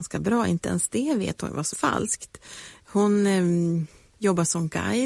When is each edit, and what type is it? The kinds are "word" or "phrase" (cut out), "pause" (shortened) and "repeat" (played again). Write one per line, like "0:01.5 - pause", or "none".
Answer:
0:01.7 - phrase